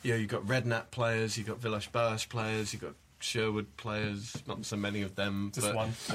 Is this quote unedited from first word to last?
yes; 0 cuts

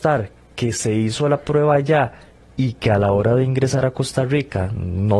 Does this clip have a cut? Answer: no; 0 cuts

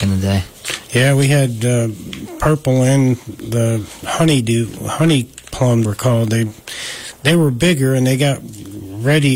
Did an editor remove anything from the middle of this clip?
yes; 1 cut; at 5.8 s

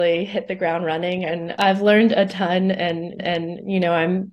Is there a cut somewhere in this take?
yes; 2 cuts; at 1.6 s, 3.2 s

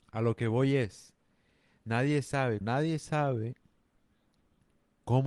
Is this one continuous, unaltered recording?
no; 1 cut; at 2.6 s

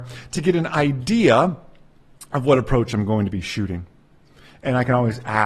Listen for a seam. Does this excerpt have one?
no; 0 cuts

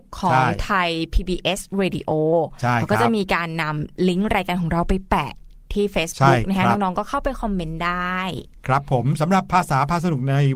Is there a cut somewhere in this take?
no; 0 cuts

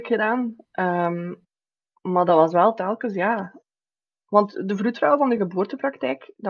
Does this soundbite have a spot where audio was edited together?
no; 0 cuts

